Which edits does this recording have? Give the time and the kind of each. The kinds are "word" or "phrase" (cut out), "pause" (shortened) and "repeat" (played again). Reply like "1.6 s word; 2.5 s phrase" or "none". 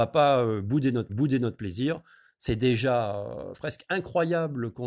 1.1 s repeat; 3.5 s word